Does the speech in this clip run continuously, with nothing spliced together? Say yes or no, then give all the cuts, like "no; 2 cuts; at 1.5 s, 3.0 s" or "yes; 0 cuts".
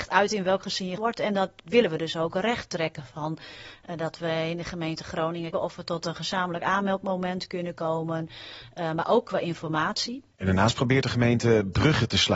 no; 3 cuts; at 1.0 s, 5.5 s, 10.3 s